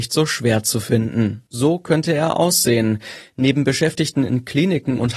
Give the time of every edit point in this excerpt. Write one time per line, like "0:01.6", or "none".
none